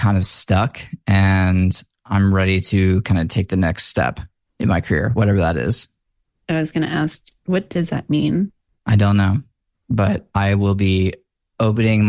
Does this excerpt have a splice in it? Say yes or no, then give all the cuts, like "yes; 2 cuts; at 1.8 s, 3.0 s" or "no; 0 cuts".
no; 0 cuts